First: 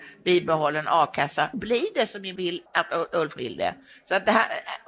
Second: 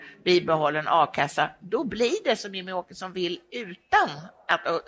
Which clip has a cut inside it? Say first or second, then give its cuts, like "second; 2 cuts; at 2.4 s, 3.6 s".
first; 4 cuts; at 1.5 s, 2.4 s, 2.7 s, 3.4 s